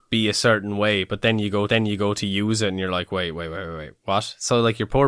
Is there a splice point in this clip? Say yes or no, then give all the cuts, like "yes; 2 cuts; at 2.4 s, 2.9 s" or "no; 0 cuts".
yes; 1 cut; at 1.7 s